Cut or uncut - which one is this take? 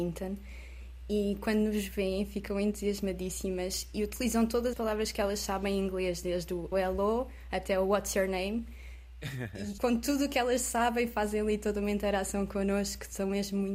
cut